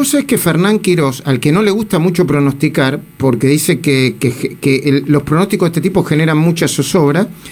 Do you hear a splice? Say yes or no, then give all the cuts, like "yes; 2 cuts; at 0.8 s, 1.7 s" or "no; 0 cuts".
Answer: no; 0 cuts